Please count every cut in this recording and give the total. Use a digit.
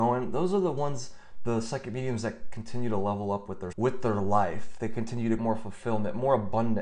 2